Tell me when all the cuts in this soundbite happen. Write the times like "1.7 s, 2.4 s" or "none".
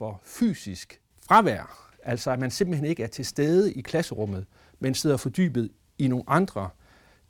none